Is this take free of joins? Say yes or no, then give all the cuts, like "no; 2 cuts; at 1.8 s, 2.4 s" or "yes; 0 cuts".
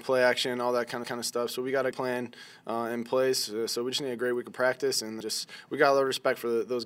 no; 3 cuts; at 1.0 s, 1.9 s, 5.2 s